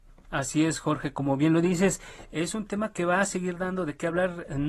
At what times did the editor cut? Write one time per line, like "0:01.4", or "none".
none